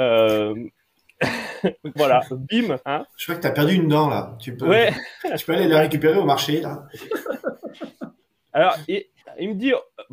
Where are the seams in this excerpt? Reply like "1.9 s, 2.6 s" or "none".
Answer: 2.0 s, 2.8 s